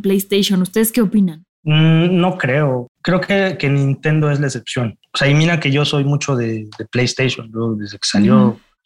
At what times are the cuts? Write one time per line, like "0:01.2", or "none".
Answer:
none

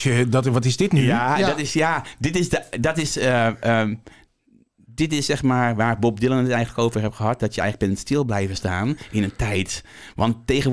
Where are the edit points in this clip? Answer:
none

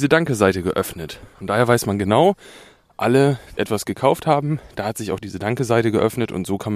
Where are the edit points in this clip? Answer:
0:03.6

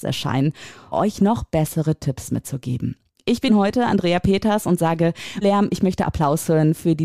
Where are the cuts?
0:00.9
0:03.5
0:05.4

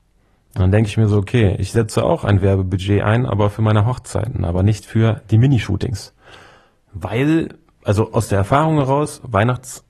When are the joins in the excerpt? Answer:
none

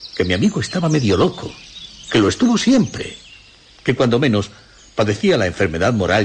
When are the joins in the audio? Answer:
none

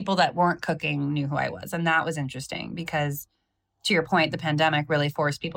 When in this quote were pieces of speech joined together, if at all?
none

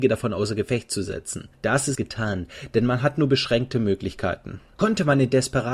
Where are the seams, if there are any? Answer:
0:01.9

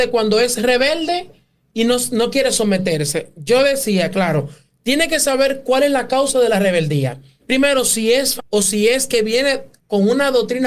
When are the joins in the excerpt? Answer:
0:07.4
0:08.4

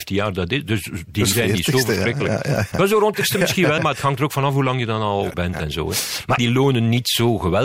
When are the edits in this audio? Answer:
0:01.3
0:02.7
0:03.1
0:03.8
0:05.3
0:06.4

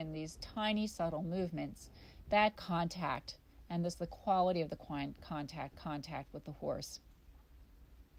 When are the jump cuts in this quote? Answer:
0:02.5
0:03.9
0:05.7

